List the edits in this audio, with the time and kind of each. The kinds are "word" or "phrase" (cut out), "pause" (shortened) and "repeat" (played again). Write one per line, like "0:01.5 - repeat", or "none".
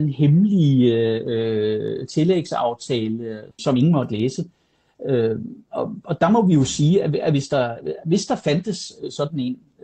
0:03.6 - word